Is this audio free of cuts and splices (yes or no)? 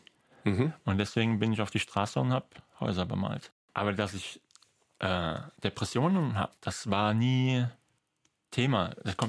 no